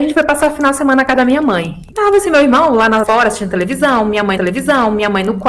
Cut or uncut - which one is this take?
cut